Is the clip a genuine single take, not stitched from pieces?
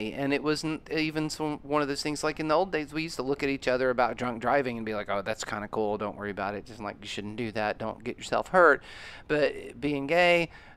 yes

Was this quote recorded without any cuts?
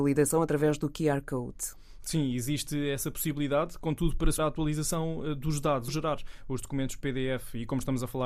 no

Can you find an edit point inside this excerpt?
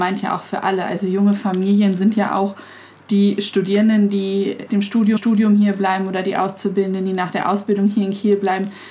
yes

